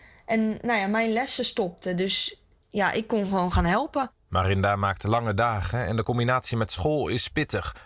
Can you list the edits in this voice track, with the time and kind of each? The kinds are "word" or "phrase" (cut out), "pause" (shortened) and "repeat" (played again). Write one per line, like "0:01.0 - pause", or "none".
none